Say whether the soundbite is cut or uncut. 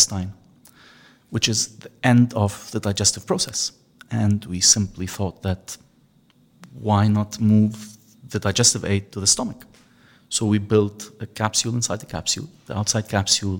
uncut